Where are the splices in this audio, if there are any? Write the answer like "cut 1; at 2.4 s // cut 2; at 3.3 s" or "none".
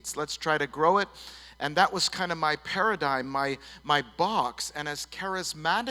none